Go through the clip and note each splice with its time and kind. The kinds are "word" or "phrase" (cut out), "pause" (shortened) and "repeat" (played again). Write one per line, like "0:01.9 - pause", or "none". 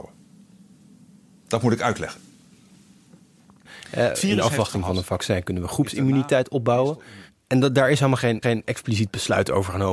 0:04.1 - word
0:08.4 - repeat